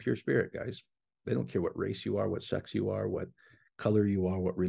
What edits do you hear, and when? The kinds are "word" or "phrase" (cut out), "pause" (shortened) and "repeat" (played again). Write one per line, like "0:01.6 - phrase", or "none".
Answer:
none